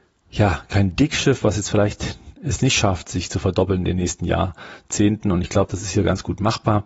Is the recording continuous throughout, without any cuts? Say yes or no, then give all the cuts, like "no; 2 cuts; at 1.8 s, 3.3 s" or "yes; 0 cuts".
yes; 0 cuts